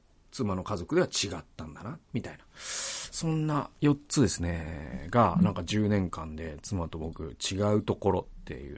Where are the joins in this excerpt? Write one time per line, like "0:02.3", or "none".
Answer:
none